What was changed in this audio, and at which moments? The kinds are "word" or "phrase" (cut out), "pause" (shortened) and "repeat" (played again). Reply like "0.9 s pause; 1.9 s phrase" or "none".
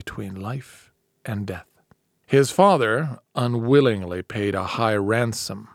none